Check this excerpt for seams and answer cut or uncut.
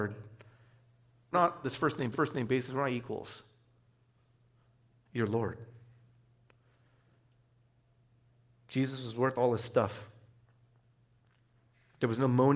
cut